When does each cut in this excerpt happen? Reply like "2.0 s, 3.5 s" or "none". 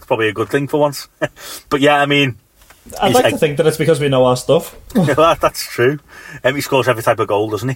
none